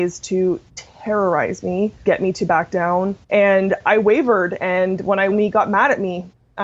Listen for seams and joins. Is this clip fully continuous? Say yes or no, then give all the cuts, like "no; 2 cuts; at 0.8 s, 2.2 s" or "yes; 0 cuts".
no; 3 cuts; at 2.1 s, 3.2 s, 5.3 s